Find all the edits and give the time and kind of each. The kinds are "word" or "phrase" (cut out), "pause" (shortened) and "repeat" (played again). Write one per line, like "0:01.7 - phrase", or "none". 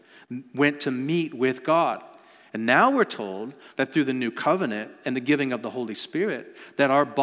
none